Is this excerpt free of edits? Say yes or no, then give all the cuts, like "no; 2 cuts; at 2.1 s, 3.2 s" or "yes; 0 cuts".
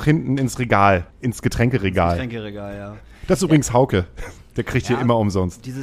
no; 1 cut; at 1.1 s